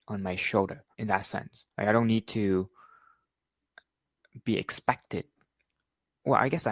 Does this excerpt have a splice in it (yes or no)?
yes